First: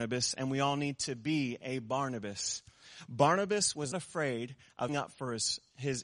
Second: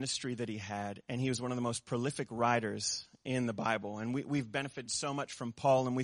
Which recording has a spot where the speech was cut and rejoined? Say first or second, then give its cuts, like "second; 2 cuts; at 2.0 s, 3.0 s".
first; 2 cuts; at 3.9 s, 4.9 s